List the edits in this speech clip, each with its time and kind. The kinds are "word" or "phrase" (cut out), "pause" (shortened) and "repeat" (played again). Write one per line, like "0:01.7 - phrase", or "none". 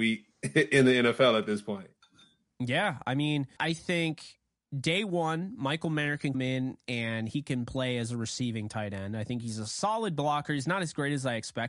0:03.6 - word
0:06.3 - word